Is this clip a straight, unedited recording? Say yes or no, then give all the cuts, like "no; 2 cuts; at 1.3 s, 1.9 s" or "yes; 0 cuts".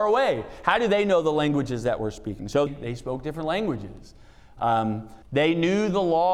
no; 2 cuts; at 2.7 s, 5.2 s